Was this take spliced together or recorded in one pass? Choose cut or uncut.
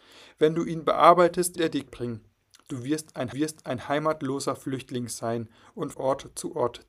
cut